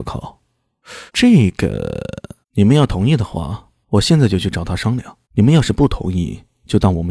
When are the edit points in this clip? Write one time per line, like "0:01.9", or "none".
0:01.1
0:02.4
0:03.8
0:05.2